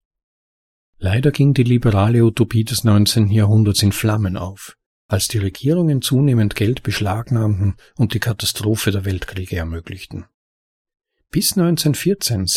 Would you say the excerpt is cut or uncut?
uncut